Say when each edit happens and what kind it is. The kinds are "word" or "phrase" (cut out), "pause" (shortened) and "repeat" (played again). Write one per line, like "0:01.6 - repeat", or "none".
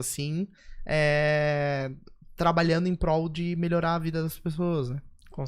none